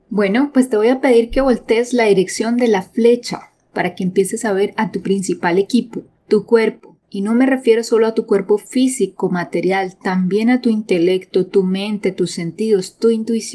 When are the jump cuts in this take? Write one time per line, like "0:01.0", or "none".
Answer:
0:06.2
0:07.0